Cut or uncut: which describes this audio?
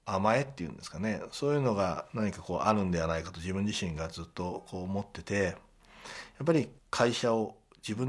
cut